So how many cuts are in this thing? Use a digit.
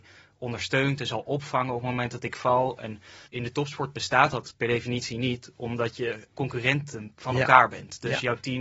2